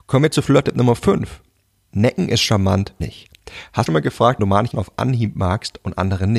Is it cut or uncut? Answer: cut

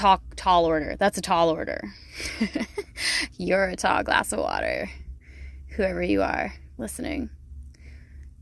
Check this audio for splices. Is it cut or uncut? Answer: uncut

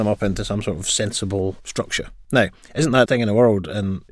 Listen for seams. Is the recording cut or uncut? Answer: cut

